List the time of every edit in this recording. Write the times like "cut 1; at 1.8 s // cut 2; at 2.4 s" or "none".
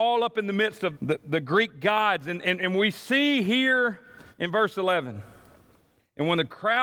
cut 1; at 0.9 s // cut 2; at 4.3 s